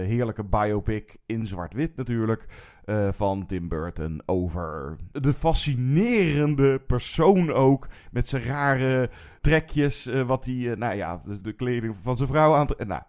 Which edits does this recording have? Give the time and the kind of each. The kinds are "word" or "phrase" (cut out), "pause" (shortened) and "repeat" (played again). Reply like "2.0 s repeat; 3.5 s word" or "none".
5.1 s pause; 11.4 s word